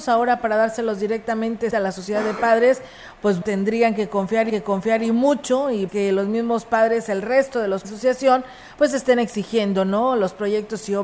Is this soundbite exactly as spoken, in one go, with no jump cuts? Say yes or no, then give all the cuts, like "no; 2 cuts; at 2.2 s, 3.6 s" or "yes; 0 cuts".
no; 5 cuts; at 1.7 s, 3.4 s, 4.5 s, 5.9 s, 7.8 s